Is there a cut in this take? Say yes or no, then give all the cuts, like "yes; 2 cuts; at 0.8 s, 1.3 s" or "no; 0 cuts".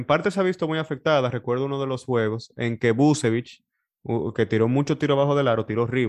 no; 0 cuts